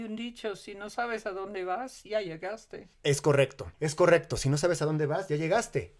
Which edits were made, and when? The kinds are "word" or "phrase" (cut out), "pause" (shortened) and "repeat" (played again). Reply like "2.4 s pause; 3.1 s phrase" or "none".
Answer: 2.9 s pause; 3.7 s pause